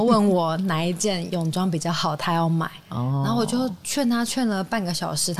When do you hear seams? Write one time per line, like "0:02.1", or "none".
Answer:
0:02.8